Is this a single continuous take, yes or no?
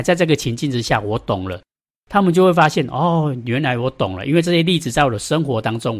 yes